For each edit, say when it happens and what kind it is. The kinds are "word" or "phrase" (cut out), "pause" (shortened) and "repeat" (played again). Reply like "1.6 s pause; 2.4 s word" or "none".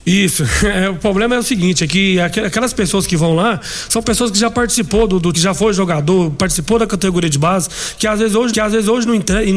5.3 s word; 8.5 s repeat